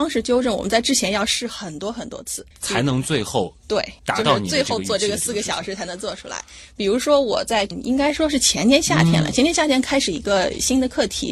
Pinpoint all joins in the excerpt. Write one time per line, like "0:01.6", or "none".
0:02.5
0:04.0